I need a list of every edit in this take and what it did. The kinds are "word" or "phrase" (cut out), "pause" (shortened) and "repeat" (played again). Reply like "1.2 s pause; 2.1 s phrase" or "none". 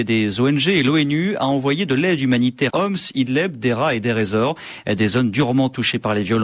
2.7 s word